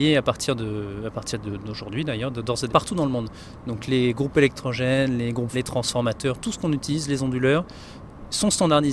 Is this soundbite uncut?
no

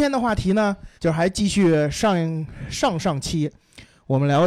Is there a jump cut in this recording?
yes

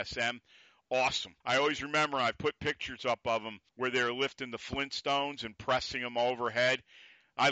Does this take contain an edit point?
yes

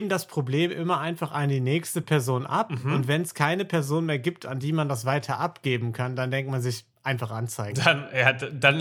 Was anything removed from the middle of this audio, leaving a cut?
no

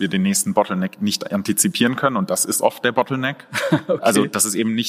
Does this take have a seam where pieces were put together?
no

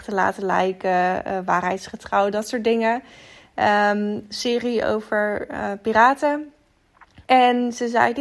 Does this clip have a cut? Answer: yes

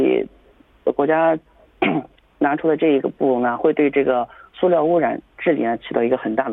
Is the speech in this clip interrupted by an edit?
no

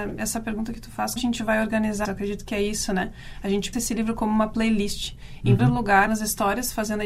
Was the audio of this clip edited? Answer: yes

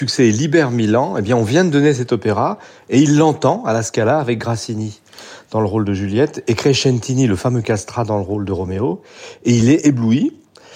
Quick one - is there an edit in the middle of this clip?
no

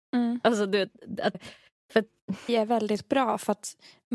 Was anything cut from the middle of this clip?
yes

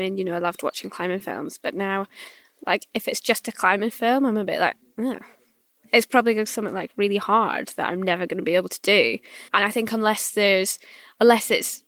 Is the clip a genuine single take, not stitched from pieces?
no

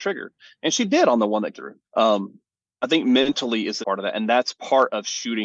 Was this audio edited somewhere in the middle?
yes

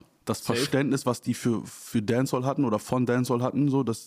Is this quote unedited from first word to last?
yes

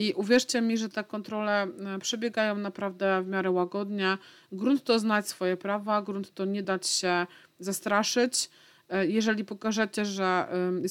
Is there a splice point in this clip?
no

